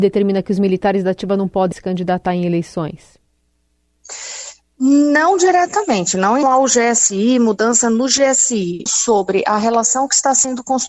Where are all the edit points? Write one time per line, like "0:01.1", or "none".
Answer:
0:01.7
0:06.4
0:08.9